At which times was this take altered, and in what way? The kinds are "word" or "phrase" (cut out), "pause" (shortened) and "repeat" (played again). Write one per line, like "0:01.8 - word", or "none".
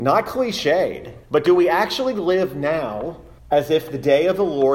0:01.2 - pause
0:03.4 - pause

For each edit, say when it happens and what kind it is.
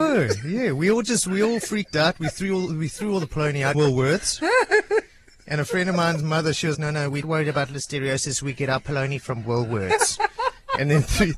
0:03.7 - word
0:06.7 - word
0:07.2 - word

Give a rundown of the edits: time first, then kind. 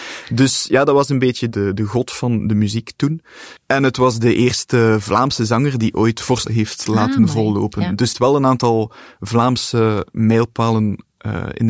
0:03.6 - pause
0:06.5 - word
0:08.1 - phrase

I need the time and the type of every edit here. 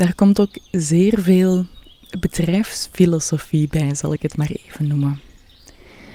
none

